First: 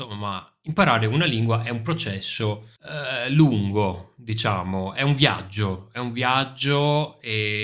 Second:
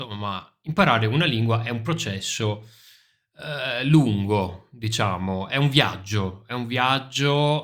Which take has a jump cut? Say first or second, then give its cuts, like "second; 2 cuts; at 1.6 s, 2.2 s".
first; 1 cut; at 2.8 s